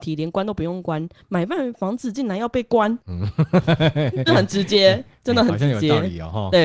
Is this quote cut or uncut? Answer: cut